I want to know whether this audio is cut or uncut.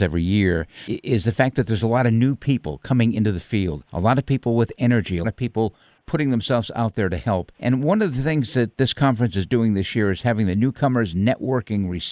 cut